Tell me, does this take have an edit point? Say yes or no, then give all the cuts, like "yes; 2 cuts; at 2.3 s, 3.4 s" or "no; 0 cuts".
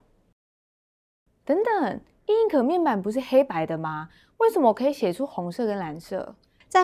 no; 0 cuts